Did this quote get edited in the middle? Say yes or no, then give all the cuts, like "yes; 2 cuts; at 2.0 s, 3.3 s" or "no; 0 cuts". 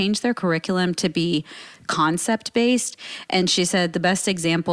no; 0 cuts